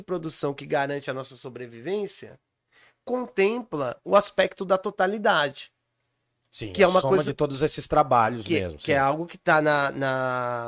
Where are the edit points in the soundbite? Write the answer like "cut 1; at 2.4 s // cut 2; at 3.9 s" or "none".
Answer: none